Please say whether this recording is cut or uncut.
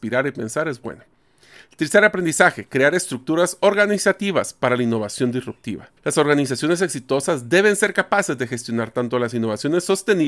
cut